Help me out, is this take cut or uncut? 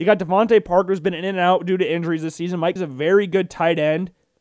cut